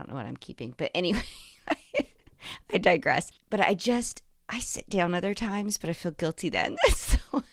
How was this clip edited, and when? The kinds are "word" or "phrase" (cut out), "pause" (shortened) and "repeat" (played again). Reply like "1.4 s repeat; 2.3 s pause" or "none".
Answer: none